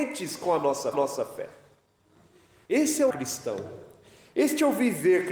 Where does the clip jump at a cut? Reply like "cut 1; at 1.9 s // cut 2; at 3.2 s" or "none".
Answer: cut 1; at 0.9 s // cut 2; at 3.1 s